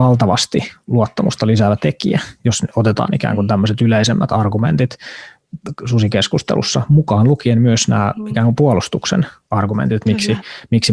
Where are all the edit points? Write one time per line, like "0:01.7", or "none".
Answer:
none